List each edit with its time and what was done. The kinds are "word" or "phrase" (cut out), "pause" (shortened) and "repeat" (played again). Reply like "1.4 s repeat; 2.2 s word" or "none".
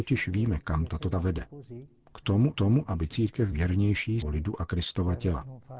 1.1 s word; 2.5 s repeat; 3.5 s word; 4.2 s phrase

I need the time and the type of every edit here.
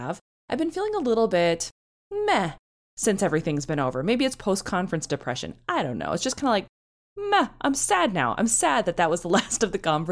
none

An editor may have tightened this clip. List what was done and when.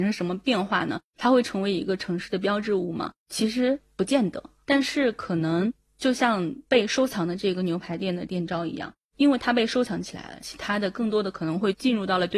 none

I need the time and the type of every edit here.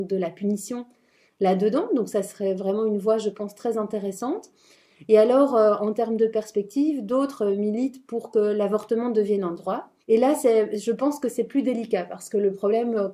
10.0 s pause

